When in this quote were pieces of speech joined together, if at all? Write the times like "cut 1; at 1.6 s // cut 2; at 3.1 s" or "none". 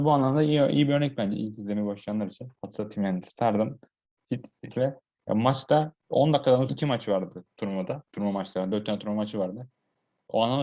cut 1; at 2.6 s // cut 2; at 4.7 s // cut 3; at 6.7 s // cut 4; at 8.1 s